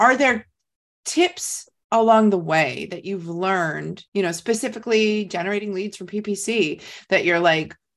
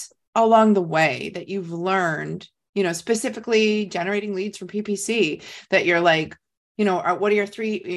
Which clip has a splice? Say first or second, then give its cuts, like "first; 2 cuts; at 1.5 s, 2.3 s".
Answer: first; 1 cut; at 4.1 s